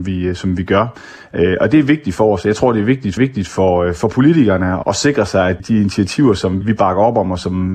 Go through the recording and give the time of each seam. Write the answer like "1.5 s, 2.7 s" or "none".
3.2 s, 4.8 s, 5.6 s, 6.6 s